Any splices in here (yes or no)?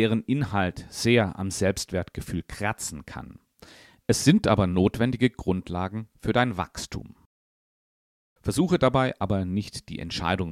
no